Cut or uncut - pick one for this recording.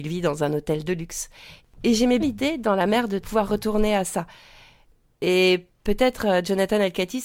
cut